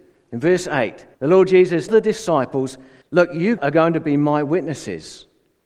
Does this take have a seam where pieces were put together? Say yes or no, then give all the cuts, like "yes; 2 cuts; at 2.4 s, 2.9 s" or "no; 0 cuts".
yes; 4 cuts; at 1.1 s, 1.9 s, 3.0 s, 3.6 s